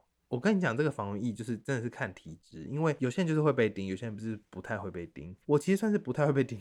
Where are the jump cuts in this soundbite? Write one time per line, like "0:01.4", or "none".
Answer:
0:05.4

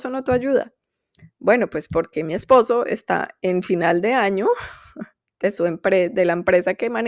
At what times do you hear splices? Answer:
none

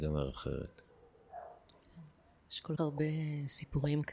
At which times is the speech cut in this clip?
0:02.8

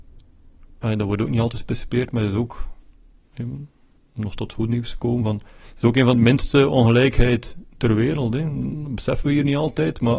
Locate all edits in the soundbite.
0:04.0
0:06.1

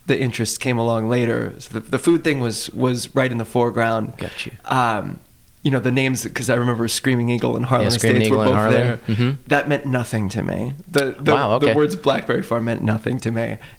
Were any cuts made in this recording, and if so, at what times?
none

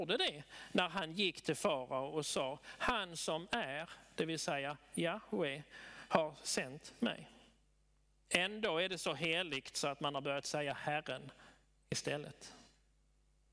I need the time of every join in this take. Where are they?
none

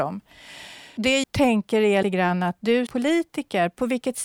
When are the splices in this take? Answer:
0:01.2
0:02.0
0:02.9

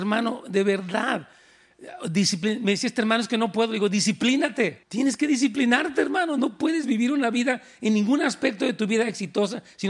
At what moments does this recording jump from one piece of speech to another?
0:04.8

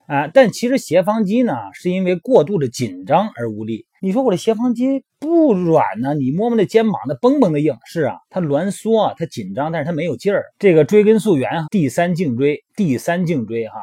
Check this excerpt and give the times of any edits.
0:04.0
0:05.1
0:08.2
0:10.5
0:11.6
0:12.7

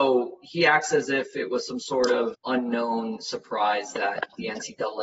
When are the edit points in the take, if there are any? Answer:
0:02.3

